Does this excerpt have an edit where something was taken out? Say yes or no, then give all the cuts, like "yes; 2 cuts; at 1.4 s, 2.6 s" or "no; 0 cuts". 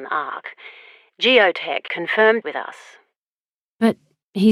yes; 2 cuts; at 1.9 s, 2.4 s